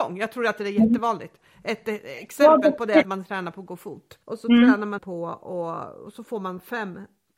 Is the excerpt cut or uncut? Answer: cut